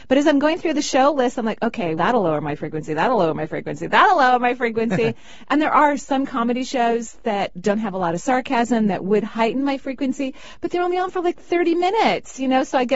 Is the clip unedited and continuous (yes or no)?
no